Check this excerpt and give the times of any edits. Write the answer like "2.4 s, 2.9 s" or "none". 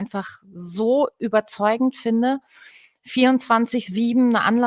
none